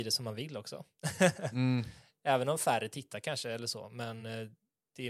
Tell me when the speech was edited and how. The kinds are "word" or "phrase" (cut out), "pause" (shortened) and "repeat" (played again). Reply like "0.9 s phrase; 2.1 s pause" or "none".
none